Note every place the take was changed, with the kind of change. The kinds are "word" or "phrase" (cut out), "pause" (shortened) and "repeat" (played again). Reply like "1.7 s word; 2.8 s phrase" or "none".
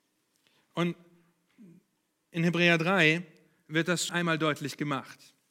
4.1 s word

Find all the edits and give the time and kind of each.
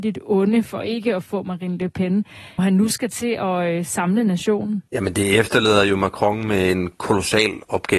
2.6 s word; 4.9 s pause

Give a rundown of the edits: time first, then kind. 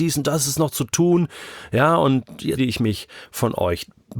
2.6 s word

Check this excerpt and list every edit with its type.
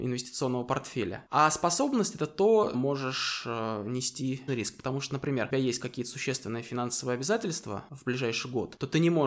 2.7 s phrase; 4.5 s word; 5.5 s phrase

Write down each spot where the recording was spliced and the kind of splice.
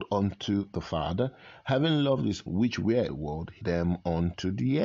2.5 s word; 3.1 s word; 3.6 s word

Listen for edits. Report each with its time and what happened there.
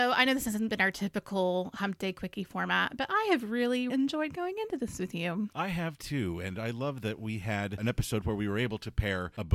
3.9 s word

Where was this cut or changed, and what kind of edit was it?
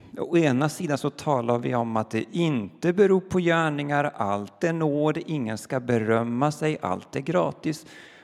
none

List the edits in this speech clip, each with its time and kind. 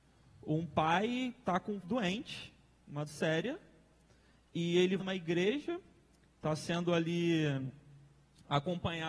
1.8 s word; 3.1 s word; 5.0 s word

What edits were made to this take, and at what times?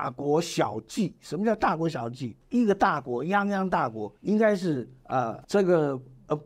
2.4 s pause; 4.2 s pause; 5.4 s pause

